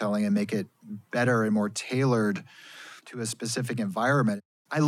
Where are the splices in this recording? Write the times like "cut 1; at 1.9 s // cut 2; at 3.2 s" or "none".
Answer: cut 1; at 3.0 s